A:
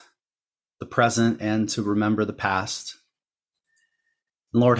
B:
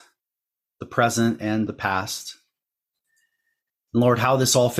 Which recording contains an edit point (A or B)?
B